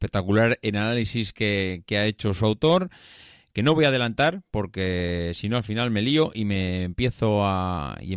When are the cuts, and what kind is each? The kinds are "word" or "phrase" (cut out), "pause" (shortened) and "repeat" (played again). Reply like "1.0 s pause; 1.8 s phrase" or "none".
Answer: none